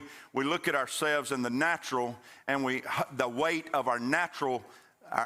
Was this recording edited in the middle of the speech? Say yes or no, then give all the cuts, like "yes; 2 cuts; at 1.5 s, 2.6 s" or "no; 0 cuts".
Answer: no; 0 cuts